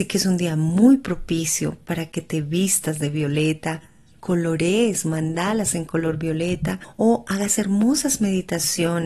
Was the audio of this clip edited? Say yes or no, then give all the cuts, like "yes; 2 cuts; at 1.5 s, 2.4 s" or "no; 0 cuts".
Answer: no; 0 cuts